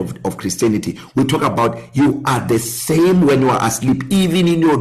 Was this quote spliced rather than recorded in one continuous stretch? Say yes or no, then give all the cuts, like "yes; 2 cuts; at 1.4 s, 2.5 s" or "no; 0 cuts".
no; 0 cuts